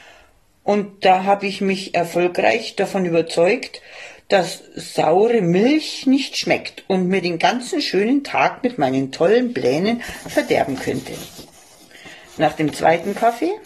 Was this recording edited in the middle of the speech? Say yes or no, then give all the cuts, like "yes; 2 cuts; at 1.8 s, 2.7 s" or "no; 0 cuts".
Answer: no; 0 cuts